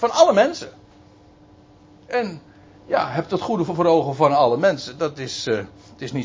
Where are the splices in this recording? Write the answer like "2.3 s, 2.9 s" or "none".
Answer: none